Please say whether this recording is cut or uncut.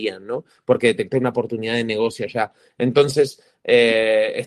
uncut